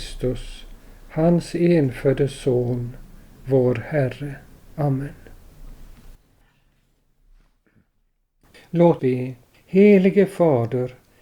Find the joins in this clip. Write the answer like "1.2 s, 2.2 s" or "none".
4.6 s, 9.0 s